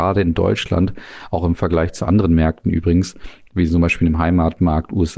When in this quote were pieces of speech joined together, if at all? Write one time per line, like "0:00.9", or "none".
none